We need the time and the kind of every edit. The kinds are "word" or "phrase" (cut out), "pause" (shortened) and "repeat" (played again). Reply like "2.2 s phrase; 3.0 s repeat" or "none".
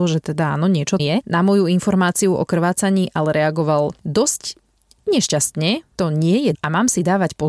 1.0 s word; 6.0 s word; 6.5 s word